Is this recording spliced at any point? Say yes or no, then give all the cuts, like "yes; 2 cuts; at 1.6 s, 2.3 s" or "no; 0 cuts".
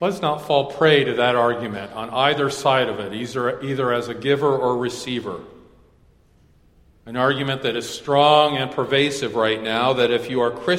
no; 0 cuts